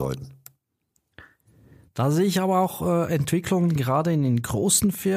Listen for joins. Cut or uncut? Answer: uncut